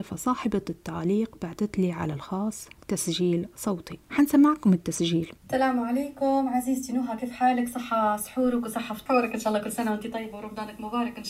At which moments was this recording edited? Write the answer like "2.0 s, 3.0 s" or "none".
4.0 s, 5.4 s